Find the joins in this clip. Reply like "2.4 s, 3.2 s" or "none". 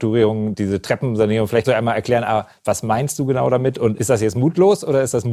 1.6 s